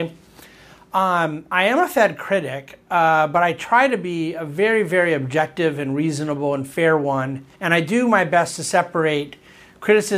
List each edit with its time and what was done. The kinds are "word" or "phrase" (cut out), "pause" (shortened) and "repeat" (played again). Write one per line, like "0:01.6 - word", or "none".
0:07.5 - pause

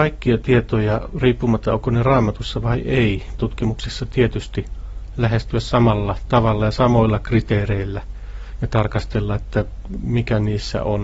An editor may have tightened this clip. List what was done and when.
0:01.7 - word
0:03.4 - phrase

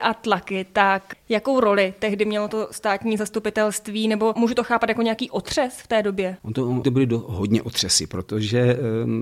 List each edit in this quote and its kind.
0:06.8 - word

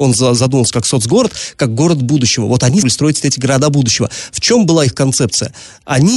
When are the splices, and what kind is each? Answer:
0:02.8 - word

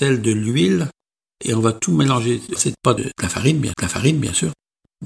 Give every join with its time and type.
0:02.6 - phrase
0:03.0 - word
0:03.7 - repeat

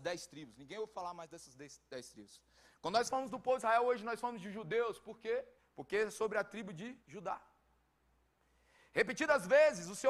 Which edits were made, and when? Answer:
0:05.6 - pause
0:07.0 - pause

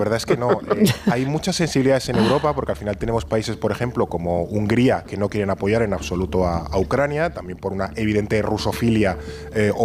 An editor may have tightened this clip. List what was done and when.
none

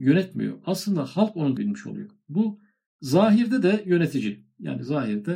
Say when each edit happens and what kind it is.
0:01.6 - word

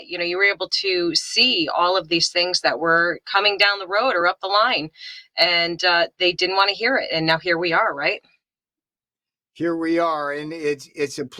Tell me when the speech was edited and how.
none

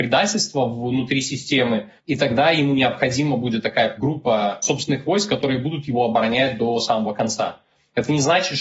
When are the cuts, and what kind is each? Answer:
0:02.0 - pause
0:04.0 - word

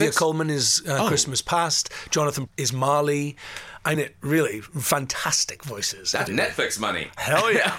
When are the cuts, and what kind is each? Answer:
0:02.5 - word
0:04.0 - word
0:06.3 - word

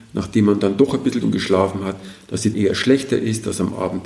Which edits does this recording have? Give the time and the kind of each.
0:01.2 - word
0:02.5 - word

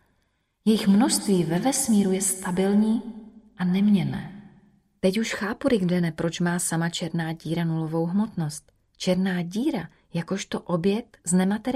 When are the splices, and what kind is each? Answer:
none

